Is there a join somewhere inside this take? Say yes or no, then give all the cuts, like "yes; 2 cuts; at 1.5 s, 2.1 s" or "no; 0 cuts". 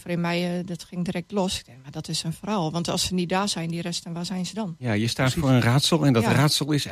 no; 0 cuts